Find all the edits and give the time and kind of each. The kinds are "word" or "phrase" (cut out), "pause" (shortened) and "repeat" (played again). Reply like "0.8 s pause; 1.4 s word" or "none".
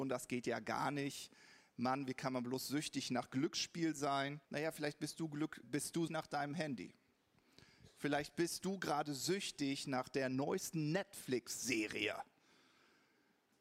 4.4 s pause; 5.6 s word; 6.1 s word